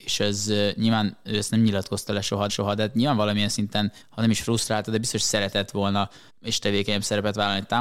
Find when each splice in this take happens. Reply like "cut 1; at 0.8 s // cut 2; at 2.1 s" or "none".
cut 1; at 2.5 s // cut 2; at 4.0 s // cut 3; at 6.3 s